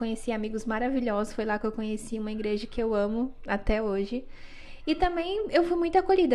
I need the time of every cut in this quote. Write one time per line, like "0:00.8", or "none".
none